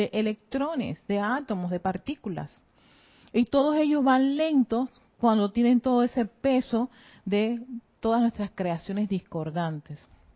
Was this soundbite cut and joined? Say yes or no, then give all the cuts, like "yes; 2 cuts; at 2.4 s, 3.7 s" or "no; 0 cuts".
no; 0 cuts